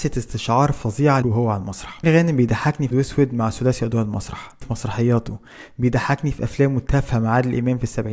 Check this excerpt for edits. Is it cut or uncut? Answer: cut